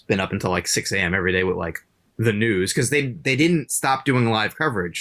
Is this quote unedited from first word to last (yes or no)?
yes